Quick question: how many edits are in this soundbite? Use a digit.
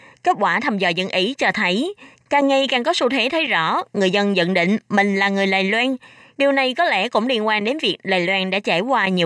0